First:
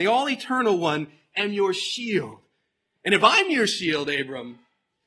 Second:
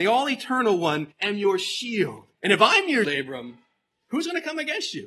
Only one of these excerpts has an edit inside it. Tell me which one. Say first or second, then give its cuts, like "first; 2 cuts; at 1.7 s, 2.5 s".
second; 3 cuts; at 1.1 s, 2.3 s, 3.0 s